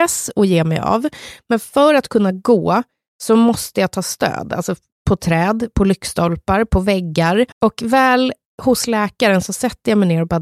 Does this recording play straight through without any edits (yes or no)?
no